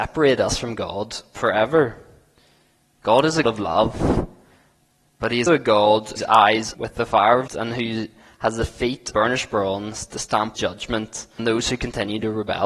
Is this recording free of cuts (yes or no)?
no